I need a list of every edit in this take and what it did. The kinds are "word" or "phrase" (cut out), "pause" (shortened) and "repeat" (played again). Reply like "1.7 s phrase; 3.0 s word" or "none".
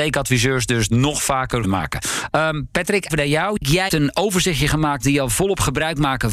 1.6 s phrase; 3.1 s word; 3.9 s word; 5.0 s phrase